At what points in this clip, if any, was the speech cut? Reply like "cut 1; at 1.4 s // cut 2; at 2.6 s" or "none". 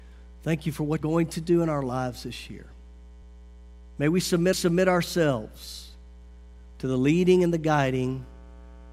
cut 1; at 1.0 s // cut 2; at 3.2 s // cut 3; at 4.5 s